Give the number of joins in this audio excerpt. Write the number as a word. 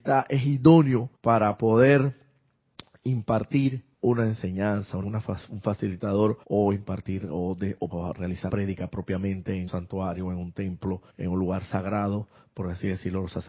eight